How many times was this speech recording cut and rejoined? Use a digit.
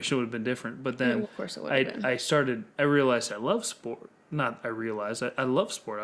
3